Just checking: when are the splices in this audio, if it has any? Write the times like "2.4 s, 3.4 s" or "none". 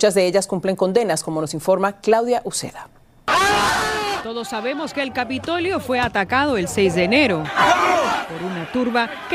none